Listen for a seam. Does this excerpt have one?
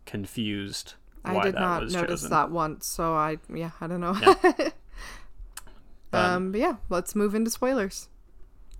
no; 0 cuts

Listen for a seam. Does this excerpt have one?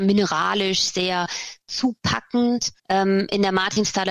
yes; 1 cut; at 2.8 s

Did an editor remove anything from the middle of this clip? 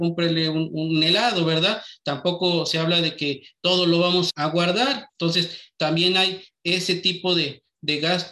yes; 2 cuts; at 4.3 s, 5.1 s

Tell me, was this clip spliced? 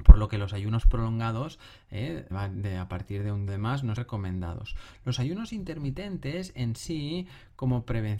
yes; 3 cuts; at 2.3 s, 3.5 s, 4.0 s

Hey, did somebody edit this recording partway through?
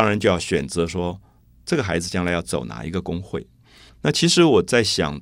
no; 0 cuts

